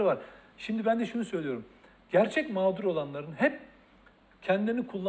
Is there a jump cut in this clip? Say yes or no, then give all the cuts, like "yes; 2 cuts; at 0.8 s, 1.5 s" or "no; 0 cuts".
no; 0 cuts